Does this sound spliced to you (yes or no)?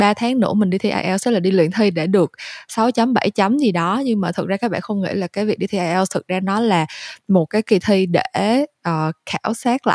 no